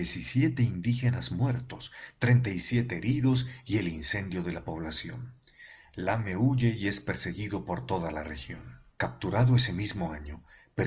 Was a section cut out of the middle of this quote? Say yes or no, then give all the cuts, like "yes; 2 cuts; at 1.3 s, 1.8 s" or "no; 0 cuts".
yes; 1 cut; at 8.9 s